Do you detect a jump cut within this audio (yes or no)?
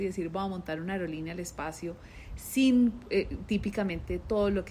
no